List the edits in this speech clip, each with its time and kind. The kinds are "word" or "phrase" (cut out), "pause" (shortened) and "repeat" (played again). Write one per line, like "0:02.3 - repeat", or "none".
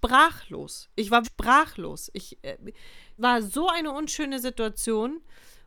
0:01.2 - word
0:03.2 - word